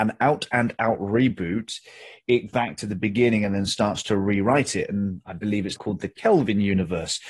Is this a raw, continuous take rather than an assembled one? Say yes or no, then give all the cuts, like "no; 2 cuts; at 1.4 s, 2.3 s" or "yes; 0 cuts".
no; 2 cuts; at 2.5 s, 5.8 s